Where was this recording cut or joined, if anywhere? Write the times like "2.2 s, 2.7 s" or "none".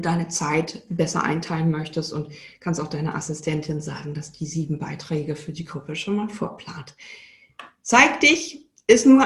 none